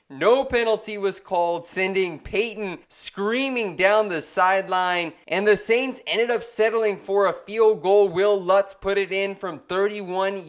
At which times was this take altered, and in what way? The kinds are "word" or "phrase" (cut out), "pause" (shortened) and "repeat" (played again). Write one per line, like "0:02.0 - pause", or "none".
0:02.8 - pause